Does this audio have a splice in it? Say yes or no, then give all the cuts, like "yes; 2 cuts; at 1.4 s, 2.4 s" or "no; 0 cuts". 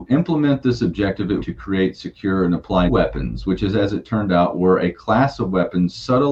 yes; 2 cuts; at 1.4 s, 2.9 s